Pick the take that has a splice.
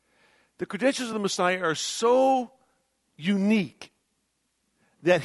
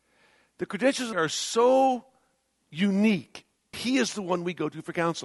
second; 2 cuts; at 1.1 s, 3.7 s

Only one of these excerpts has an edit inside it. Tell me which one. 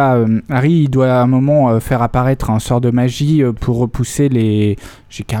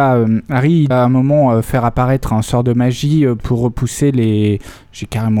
second; 1 cut; at 0.9 s

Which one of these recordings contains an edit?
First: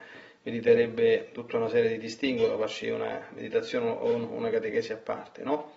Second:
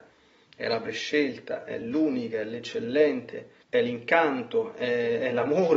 second; 1 cut; at 3.6 s

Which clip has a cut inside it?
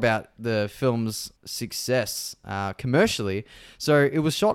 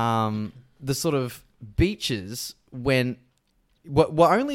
first; 1 cut; at 1.4 s

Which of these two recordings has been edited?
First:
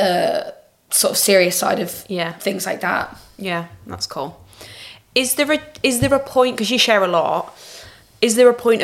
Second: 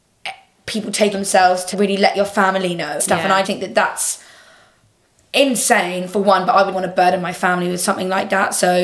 second; 5 cuts; at 1.1 s, 1.7 s, 3.0 s, 3.4 s, 6.7 s

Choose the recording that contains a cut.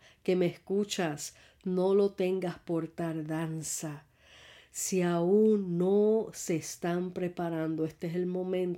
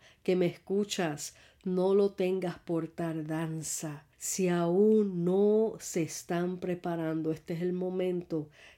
second; 1 cut; at 4.1 s

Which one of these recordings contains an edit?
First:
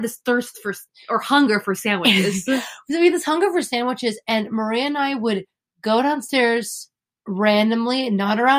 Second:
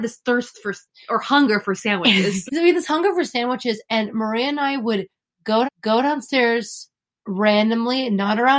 second; 2 cuts; at 2.5 s, 5.6 s

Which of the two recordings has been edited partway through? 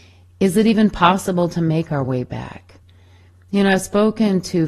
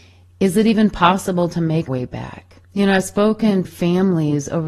second; 3 cuts; at 1.9 s, 2.6 s, 3.6 s

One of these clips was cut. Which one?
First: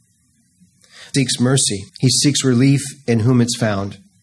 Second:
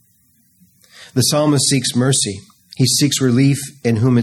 first; 2 cuts; at 1.1 s, 1.9 s

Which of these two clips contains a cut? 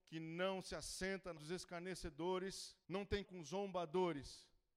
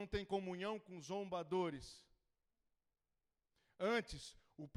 first; 3 cuts; at 1.4 s, 2.8 s, 3.2 s

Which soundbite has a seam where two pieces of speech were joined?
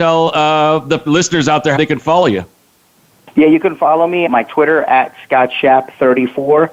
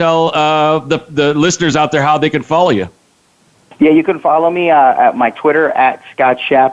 first; 3 cuts; at 1.1 s, 1.8 s, 4.3 s

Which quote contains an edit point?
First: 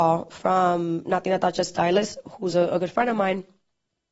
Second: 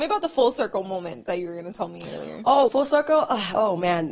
second; 1 cut; at 2.7 s

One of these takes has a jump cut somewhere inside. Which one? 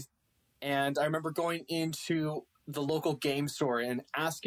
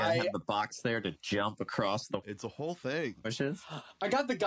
second; 1 cut; at 2.2 s

